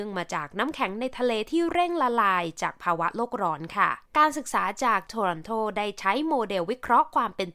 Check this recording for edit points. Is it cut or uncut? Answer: cut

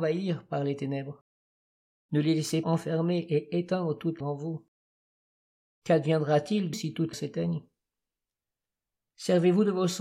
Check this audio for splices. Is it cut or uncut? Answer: cut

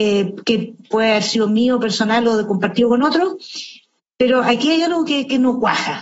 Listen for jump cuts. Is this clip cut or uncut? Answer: uncut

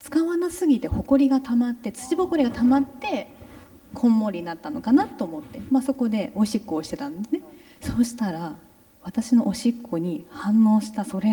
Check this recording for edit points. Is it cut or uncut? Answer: uncut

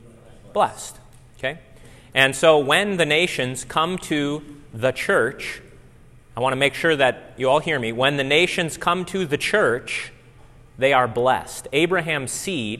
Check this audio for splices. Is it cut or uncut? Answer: uncut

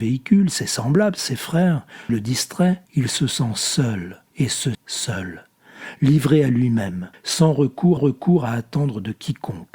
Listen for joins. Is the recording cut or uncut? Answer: cut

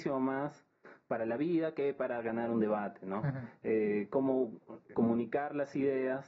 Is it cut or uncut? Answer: cut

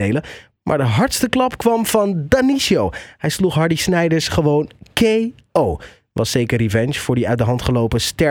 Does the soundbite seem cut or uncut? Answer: uncut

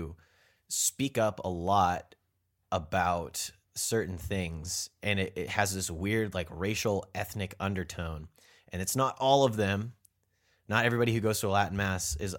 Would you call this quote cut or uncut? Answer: uncut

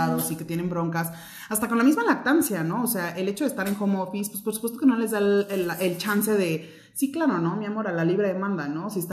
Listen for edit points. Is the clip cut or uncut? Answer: uncut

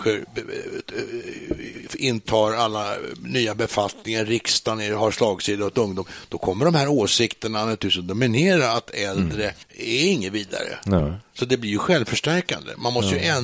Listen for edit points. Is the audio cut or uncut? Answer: cut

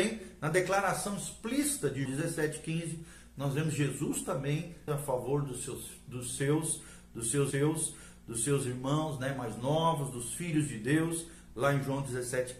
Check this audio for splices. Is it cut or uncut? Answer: cut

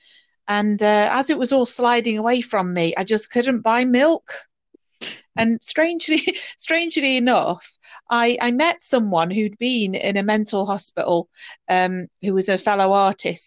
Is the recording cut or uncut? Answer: uncut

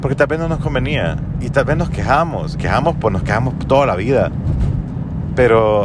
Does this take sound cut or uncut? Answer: cut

